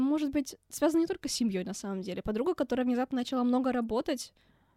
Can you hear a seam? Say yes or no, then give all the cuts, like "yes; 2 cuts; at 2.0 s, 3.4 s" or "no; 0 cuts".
no; 0 cuts